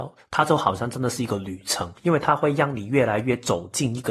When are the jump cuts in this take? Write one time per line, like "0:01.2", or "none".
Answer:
0:02.0